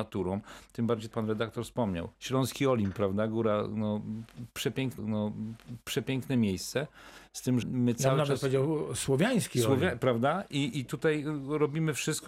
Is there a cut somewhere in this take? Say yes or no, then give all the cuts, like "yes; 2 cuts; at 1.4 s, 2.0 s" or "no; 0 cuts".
yes; 4 cuts; at 1.1 s, 2.1 s, 5.0 s, 7.6 s